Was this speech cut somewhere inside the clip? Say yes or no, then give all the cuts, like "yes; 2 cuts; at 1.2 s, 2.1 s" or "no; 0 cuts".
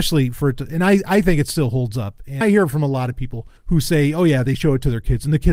yes; 2 cuts; at 2.4 s, 3.6 s